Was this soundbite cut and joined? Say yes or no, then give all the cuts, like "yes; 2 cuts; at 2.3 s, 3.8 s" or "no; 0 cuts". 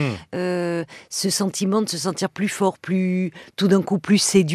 no; 0 cuts